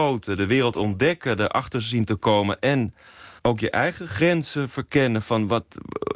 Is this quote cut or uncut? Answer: cut